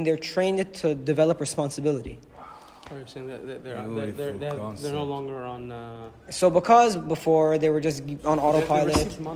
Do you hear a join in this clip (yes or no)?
no